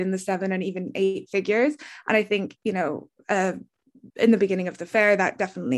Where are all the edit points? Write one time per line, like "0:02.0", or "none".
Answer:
0:04.1